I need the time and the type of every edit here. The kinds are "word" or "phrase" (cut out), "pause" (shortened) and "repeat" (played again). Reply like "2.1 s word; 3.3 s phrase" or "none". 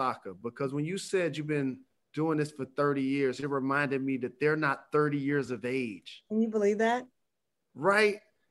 none